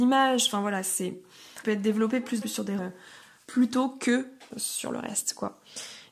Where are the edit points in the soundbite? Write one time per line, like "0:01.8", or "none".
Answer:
0:01.6
0:02.4
0:02.8
0:04.5

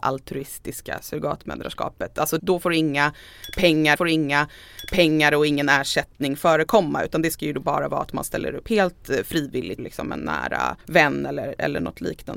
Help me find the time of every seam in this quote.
0:02.4
0:04.0
0:09.8
0:10.8

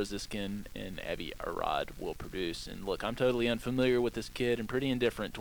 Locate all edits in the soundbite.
none

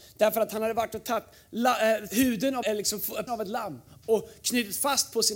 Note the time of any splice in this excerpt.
0:02.1
0:02.6
0:03.3

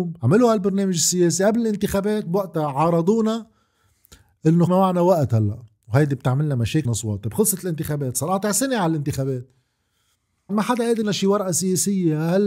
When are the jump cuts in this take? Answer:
0:04.7
0:06.8
0:10.5
0:11.0

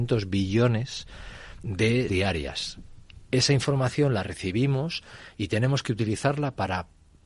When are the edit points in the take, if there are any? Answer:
0:02.1

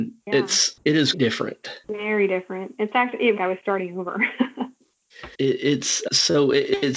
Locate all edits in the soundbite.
0:01.1
0:01.8
0:03.4
0:05.3

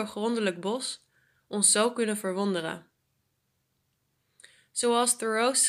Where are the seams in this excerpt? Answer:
none

